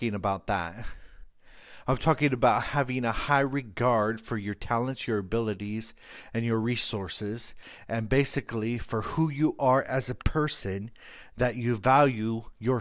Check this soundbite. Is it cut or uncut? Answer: uncut